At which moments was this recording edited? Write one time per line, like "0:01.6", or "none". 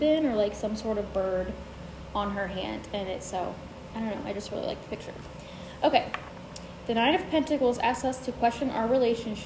none